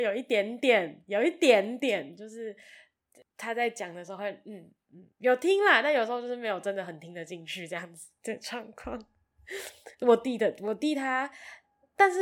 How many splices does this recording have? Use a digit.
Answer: 2